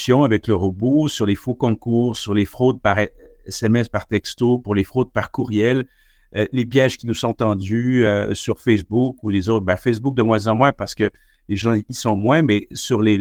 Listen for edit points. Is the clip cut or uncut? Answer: uncut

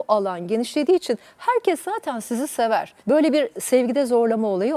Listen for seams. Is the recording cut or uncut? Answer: cut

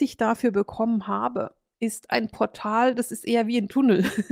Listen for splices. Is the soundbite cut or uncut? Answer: uncut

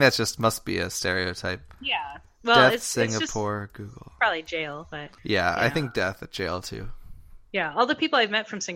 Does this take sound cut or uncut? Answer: cut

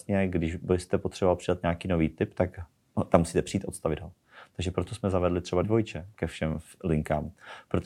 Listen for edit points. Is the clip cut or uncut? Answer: cut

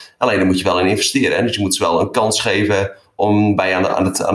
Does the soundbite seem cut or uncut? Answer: uncut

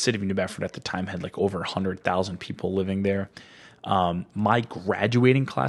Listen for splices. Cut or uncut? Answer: uncut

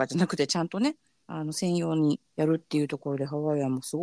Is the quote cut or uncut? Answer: cut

